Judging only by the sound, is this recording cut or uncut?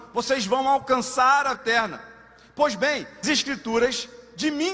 cut